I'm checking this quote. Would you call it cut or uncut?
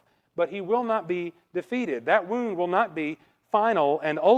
uncut